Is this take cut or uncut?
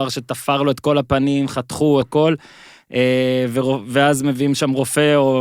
cut